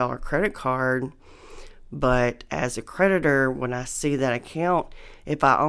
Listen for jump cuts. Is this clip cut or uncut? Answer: uncut